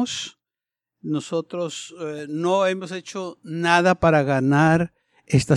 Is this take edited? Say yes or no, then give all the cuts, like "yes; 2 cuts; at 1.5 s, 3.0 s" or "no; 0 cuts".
no; 0 cuts